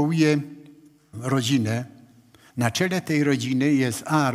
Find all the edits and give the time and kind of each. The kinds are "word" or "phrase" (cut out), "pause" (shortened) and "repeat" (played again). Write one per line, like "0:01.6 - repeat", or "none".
0:01.1 - word

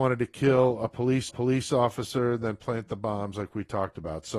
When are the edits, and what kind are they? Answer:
0:01.3 - repeat

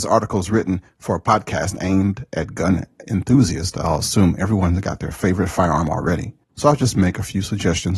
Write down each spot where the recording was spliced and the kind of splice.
0:06.4 - pause

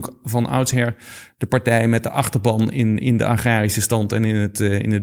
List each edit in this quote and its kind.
none

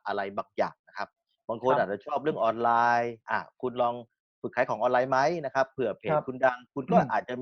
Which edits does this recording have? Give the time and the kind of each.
none

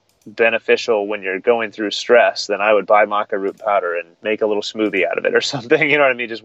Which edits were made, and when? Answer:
0:04.1 - pause

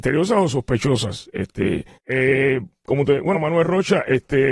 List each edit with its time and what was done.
0:01.9 - pause
0:03.3 - word

